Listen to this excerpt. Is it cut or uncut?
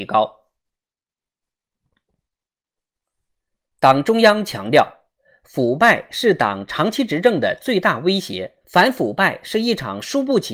cut